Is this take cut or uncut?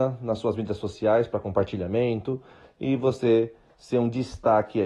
uncut